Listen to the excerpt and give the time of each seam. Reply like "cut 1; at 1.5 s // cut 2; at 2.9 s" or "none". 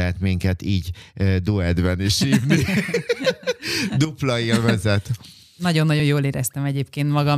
none